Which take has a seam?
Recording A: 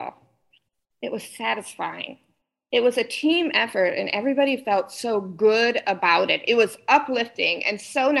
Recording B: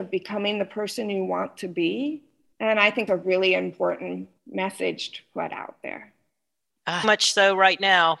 B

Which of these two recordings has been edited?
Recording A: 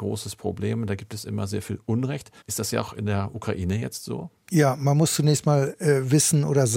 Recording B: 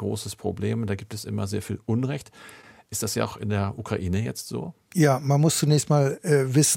A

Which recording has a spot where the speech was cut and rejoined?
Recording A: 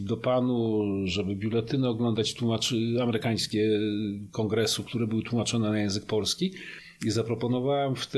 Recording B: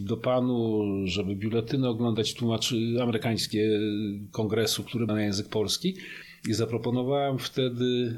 B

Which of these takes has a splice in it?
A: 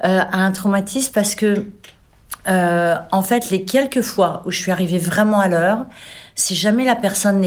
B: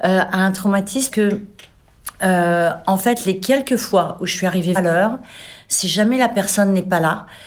B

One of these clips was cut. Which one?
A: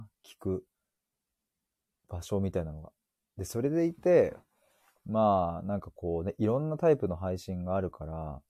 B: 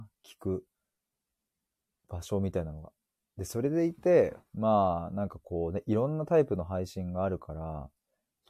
B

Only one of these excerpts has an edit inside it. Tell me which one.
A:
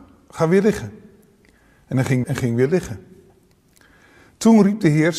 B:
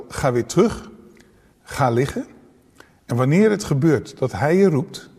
A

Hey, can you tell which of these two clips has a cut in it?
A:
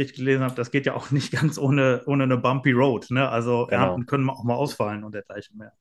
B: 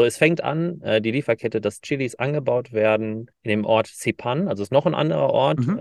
B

